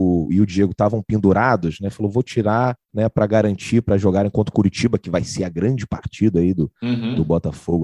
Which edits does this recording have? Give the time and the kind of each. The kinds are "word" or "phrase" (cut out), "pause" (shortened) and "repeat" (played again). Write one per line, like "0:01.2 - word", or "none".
0:02.8 - pause

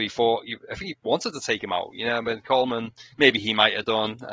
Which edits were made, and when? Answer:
0:00.9 - word
0:03.1 - pause

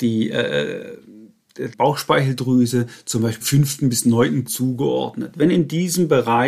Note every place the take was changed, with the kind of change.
0:01.7 - word
0:03.4 - word
0:04.5 - word

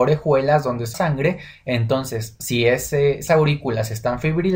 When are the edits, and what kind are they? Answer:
0:00.9 - word
0:03.3 - word

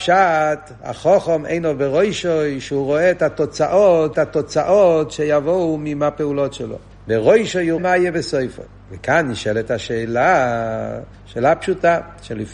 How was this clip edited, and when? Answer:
0:04.1 - repeat
0:06.9 - pause
0:07.8 - word
0:11.1 - pause

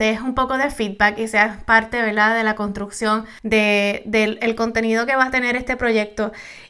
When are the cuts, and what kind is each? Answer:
none

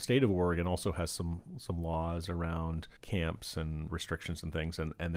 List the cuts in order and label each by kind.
0:03.0 - pause
0:03.9 - word

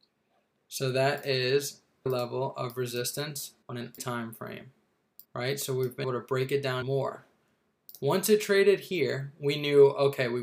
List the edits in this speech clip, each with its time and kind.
0:02.1 - word
0:03.6 - pause
0:04.0 - word
0:05.2 - pause
0:06.0 - word
0:06.8 - word

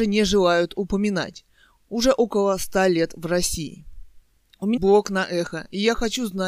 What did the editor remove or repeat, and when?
0:04.8 - word

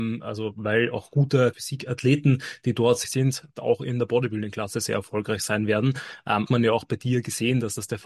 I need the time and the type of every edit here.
0:01.5 - word
0:03.0 - word
0:06.5 - word

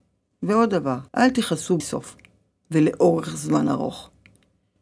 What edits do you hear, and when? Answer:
0:01.1 - pause
0:01.8 - word

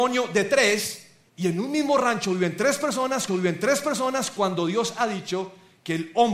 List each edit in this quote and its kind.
0:01.3 - pause
0:03.3 - repeat

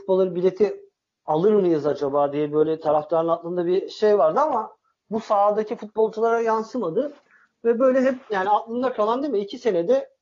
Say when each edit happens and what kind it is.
none

